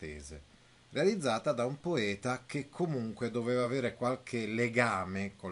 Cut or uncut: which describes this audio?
uncut